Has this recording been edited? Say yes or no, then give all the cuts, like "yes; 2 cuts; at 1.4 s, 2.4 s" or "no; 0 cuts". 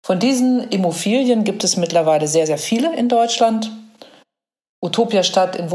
no; 0 cuts